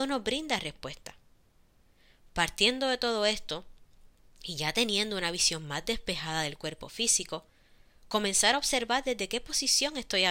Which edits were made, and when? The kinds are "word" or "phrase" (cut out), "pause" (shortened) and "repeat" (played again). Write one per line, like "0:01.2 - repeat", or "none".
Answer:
none